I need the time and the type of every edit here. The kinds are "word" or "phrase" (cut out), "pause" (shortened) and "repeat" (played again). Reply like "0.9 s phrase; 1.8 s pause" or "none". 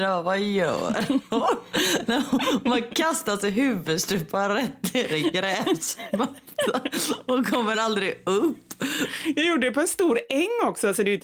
none